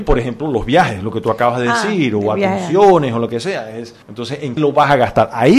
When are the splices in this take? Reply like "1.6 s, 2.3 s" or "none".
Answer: 4.0 s, 4.6 s